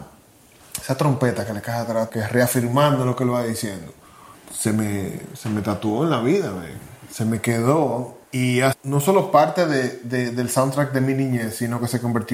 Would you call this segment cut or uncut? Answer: cut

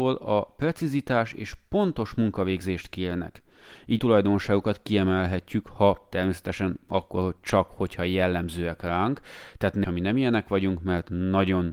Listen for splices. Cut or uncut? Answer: cut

